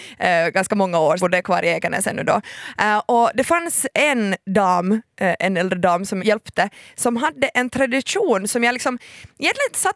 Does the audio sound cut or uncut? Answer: cut